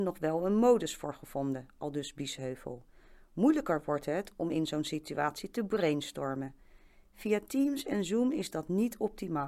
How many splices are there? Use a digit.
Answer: 0